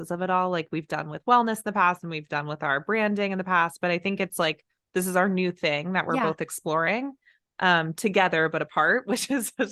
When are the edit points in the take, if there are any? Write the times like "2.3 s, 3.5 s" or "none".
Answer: none